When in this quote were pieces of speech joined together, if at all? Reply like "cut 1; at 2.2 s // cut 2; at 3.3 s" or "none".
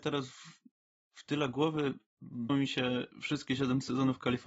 cut 1; at 2.5 s